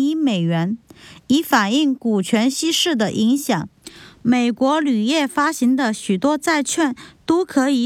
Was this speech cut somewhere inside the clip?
no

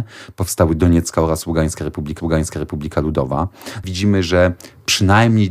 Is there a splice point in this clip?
yes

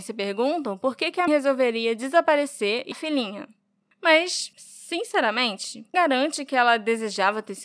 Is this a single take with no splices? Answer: no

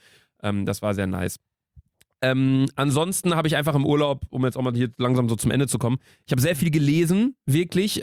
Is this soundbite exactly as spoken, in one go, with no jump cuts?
yes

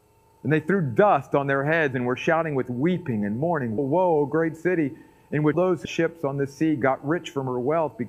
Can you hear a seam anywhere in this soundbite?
yes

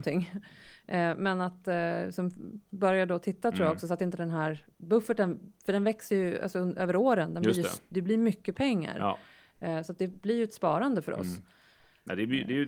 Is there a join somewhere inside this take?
no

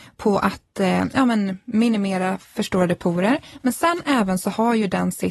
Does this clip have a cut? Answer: no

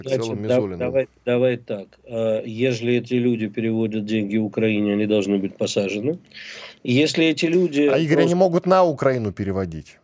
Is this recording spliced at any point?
no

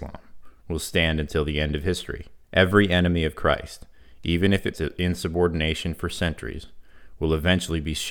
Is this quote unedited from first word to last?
no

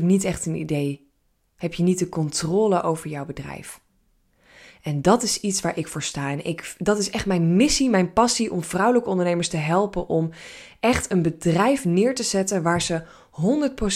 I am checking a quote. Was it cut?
no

